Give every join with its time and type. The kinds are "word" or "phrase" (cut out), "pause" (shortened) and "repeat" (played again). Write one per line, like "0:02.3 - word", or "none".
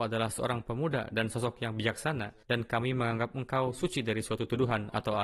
0:02.4 - pause